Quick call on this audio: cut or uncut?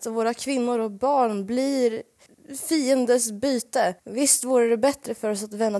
cut